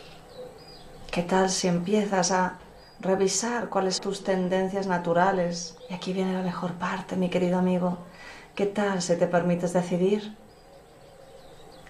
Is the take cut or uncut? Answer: cut